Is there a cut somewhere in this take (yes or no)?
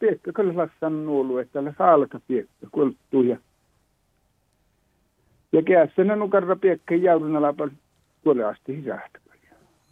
no